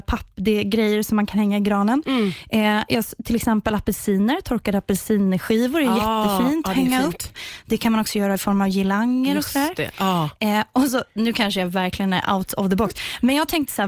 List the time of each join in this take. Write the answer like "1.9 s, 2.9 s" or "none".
10.9 s